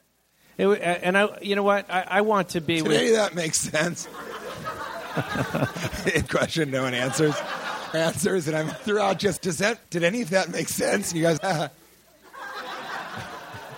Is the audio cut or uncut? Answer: cut